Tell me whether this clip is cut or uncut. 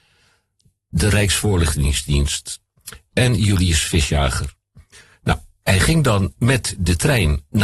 uncut